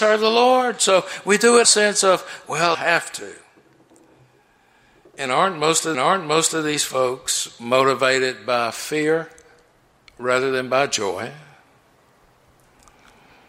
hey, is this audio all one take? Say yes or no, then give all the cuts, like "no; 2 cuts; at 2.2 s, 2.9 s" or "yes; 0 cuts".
no; 3 cuts; at 1.6 s, 2.7 s, 5.9 s